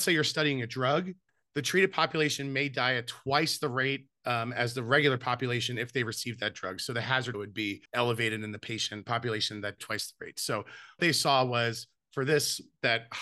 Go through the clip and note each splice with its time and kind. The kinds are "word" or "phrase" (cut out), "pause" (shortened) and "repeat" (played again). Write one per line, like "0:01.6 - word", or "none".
0:01.3 - pause
0:04.2 - pause
0:07.3 - word
0:07.9 - pause
0:09.8 - phrase
0:11.0 - word